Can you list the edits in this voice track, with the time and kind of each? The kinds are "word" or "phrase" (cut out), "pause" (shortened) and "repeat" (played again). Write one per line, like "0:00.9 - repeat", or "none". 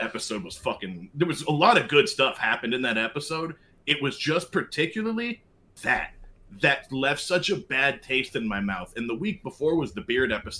none